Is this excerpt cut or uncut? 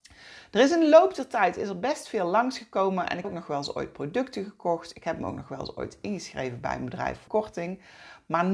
cut